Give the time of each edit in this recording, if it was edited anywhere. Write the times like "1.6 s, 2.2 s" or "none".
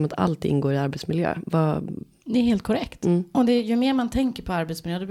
none